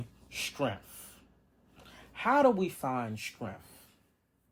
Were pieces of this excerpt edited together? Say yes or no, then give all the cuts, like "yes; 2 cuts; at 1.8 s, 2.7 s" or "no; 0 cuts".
no; 0 cuts